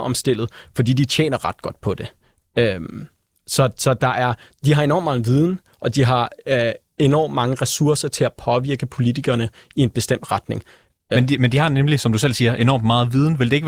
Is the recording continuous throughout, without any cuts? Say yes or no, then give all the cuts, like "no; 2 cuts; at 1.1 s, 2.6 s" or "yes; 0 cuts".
yes; 0 cuts